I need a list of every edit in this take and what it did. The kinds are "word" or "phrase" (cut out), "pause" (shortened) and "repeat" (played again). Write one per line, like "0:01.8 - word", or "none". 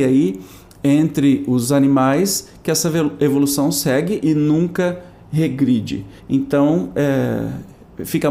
0:06.2 - pause